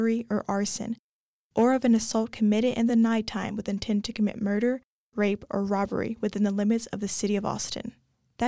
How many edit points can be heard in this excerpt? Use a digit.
0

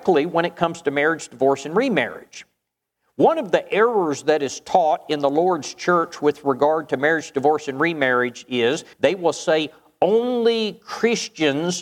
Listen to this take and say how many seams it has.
1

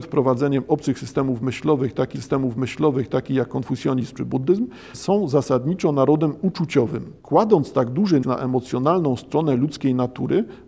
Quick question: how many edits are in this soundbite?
4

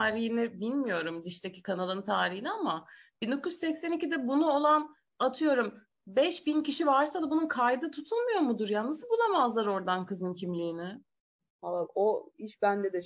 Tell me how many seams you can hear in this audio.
0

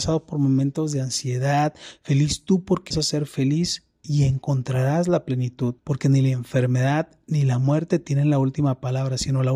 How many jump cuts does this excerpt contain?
2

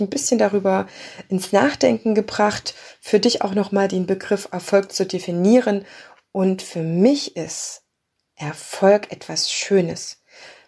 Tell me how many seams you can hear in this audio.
0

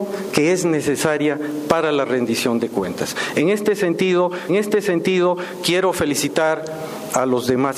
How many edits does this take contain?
1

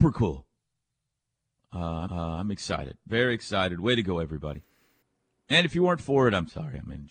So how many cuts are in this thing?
2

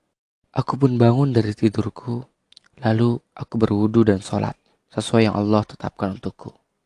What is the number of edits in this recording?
0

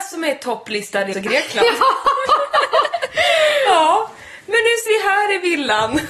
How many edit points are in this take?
2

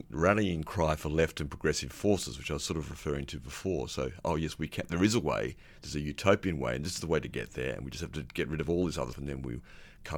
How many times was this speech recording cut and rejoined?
1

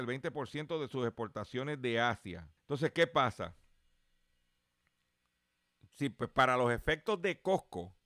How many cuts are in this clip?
1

